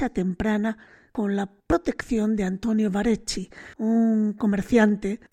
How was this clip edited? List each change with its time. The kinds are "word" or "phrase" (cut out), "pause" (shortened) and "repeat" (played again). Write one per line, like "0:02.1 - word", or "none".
0:01.6 - pause
0:03.7 - pause